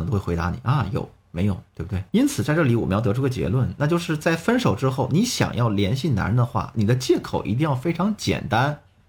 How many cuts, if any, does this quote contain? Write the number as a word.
two